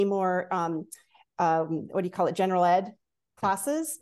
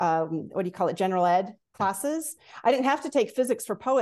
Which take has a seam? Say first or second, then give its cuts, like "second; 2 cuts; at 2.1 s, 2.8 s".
second; 1 cut; at 1.6 s